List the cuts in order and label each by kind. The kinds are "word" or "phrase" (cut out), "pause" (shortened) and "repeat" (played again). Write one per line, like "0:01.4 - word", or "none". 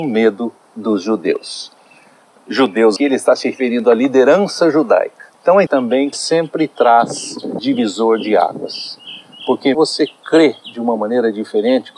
0:03.0 - word
0:05.3 - pause
0:05.7 - word
0:06.1 - phrase
0:07.6 - word
0:09.7 - phrase